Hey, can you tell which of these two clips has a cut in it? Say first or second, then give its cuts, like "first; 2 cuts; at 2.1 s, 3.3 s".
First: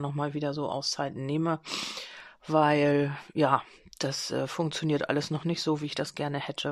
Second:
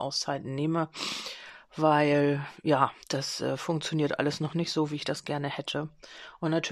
second; 1 cut; at 3.0 s